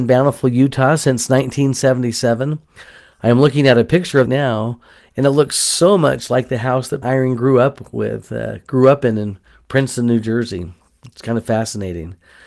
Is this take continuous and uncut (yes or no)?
no